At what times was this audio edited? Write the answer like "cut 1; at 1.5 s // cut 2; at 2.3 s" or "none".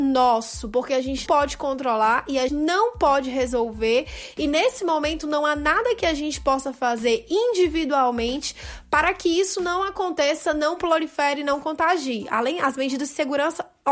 cut 1; at 1.3 s // cut 2; at 2.5 s